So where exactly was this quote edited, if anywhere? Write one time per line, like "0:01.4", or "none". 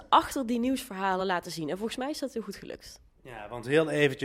none